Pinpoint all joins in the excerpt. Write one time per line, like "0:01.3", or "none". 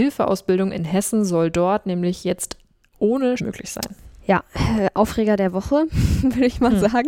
0:03.4